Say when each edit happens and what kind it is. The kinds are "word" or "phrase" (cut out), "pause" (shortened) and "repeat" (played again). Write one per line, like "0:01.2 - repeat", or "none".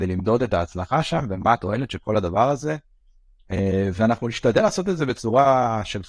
none